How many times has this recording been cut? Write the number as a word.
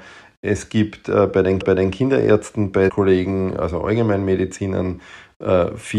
two